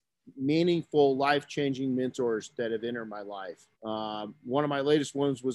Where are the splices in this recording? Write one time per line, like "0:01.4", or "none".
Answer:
0:03.7